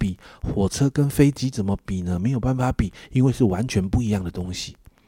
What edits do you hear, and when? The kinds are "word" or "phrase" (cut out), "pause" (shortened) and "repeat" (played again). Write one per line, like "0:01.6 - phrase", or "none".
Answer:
none